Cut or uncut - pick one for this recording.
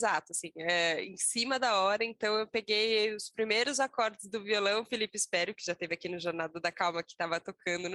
uncut